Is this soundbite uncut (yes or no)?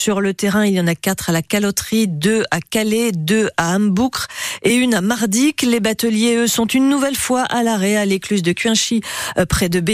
yes